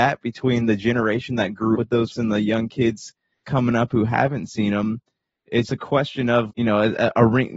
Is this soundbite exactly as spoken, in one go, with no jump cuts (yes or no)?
no